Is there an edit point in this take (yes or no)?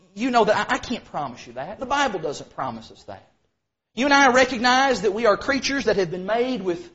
no